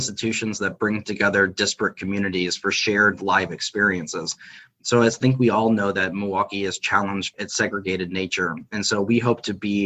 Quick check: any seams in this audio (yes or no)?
yes